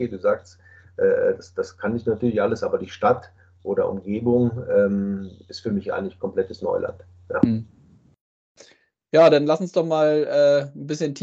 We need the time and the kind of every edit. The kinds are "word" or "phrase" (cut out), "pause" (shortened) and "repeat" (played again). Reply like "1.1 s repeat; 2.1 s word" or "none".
none